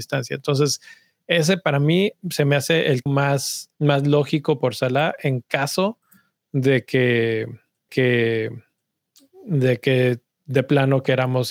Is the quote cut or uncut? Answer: cut